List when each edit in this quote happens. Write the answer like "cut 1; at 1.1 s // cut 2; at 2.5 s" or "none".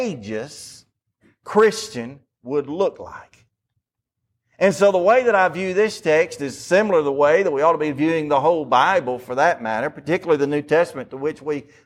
none